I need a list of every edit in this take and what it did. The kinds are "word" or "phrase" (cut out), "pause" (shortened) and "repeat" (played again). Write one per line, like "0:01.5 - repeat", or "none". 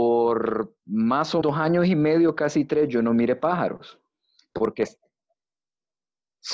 0:01.4 - word

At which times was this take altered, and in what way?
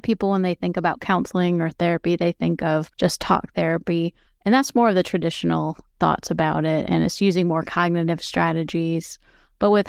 0:02.9 - pause
0:04.3 - pause

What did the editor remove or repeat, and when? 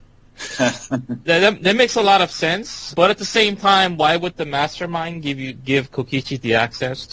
0:02.9 - word

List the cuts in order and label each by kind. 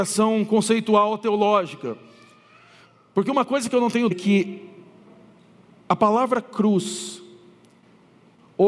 0:04.1 - word

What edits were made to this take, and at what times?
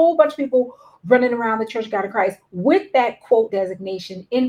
0:03.5 - word

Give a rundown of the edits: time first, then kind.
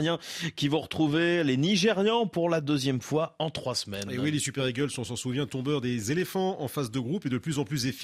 none

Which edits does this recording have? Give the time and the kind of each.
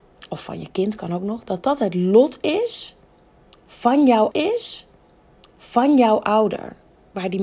0:04.3 - repeat

